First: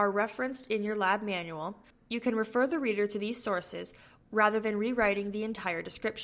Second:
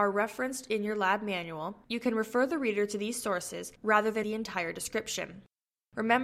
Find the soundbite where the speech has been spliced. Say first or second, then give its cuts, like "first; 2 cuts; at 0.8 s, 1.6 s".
second; 3 cuts; at 1.8 s, 3.8 s, 4.2 s